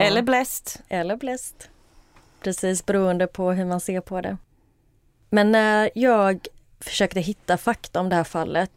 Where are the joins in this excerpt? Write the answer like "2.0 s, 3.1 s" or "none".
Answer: none